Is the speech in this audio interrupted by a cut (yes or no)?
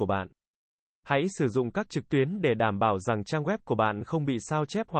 yes